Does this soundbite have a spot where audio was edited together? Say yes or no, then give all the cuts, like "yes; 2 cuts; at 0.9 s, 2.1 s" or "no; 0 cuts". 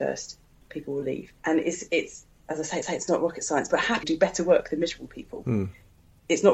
yes; 3 cuts; at 1.4 s, 2.8 s, 4.0 s